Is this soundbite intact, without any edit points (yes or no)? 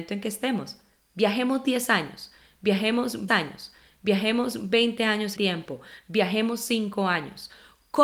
no